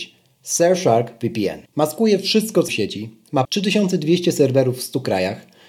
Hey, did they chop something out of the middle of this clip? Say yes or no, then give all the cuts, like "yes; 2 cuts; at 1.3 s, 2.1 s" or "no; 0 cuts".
yes; 3 cuts; at 1.7 s, 2.7 s, 3.4 s